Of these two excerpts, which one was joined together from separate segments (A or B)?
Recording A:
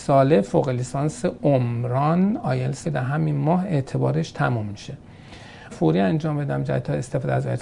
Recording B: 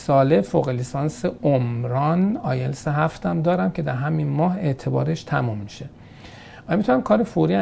A